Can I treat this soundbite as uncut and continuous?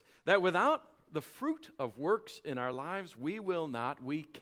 yes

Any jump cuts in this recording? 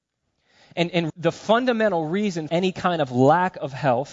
yes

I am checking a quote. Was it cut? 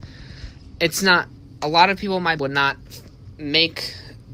yes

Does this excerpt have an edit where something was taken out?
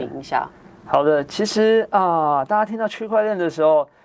no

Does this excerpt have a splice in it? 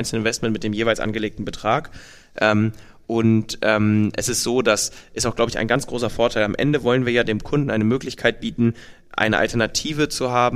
no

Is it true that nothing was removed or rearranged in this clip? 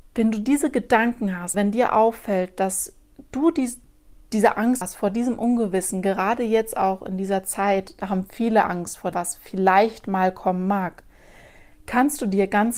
no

